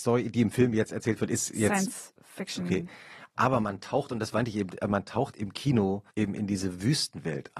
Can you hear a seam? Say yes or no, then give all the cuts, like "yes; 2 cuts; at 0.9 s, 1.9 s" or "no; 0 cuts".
yes; 1 cut; at 6.1 s